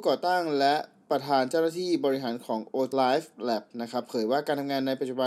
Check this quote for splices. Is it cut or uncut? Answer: cut